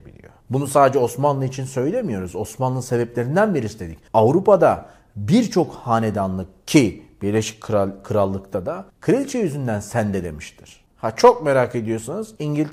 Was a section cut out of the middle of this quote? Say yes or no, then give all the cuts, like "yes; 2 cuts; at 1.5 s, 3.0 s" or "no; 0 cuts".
yes; 2 cuts; at 4.1 s, 8.9 s